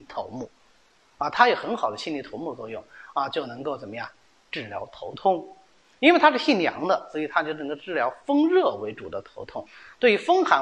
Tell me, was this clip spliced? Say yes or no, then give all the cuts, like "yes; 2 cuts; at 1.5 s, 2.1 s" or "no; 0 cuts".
no; 0 cuts